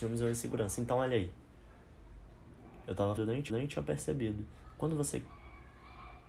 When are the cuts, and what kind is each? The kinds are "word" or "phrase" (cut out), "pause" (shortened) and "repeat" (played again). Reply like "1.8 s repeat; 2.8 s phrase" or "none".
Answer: 3.2 s word; 3.5 s repeat